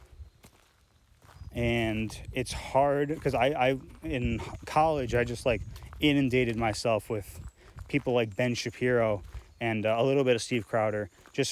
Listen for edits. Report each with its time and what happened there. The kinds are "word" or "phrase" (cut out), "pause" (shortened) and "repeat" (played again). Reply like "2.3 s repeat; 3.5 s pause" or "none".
none

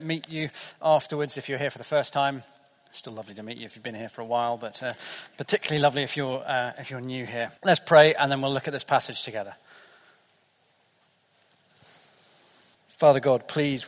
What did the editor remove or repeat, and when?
7.6 s pause

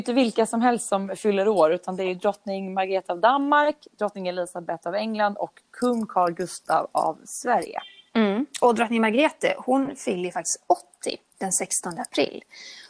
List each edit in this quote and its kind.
none

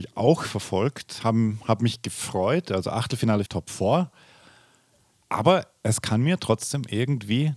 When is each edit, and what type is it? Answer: 3.5 s word

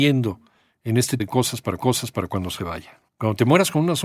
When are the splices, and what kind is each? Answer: 1.2 s word; 1.8 s repeat; 3.1 s pause

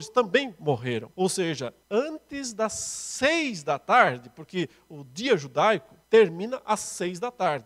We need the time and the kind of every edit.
1.1 s pause; 1.8 s pause; 6.0 s pause

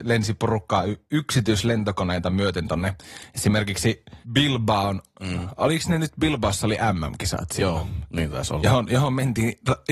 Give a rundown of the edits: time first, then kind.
4.2 s pause

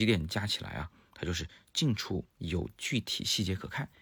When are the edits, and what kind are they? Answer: 2.3 s pause

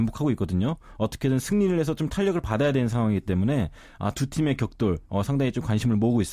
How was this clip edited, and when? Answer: none

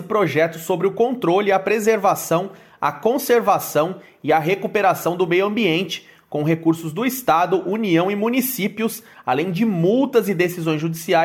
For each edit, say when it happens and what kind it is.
none

